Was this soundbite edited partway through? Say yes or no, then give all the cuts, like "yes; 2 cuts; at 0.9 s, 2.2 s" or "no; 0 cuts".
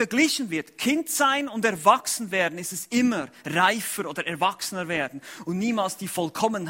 no; 0 cuts